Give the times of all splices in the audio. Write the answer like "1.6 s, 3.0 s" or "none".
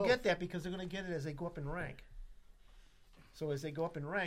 none